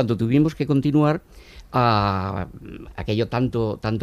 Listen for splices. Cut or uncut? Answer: cut